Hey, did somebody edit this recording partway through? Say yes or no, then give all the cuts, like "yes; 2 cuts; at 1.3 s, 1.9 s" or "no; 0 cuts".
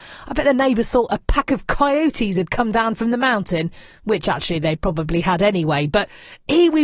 no; 0 cuts